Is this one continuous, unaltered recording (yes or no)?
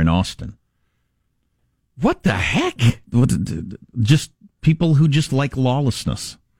yes